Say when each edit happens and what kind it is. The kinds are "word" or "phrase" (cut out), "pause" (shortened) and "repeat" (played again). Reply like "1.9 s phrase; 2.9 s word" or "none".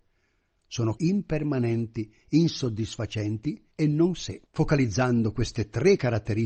1.0 s phrase; 3.7 s pause; 4.5 s pause